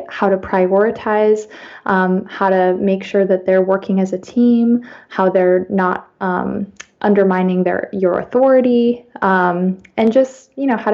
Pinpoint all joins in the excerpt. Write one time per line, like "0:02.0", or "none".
none